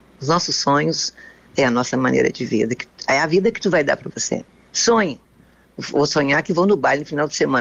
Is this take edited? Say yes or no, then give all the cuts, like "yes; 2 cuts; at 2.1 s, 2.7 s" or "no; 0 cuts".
no; 0 cuts